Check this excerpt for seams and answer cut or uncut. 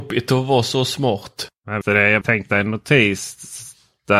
cut